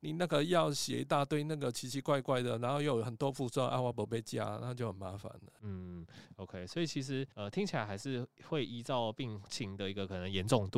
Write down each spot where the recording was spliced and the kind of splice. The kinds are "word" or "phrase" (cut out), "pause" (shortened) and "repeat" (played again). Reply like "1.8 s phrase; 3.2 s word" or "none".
7.3 s pause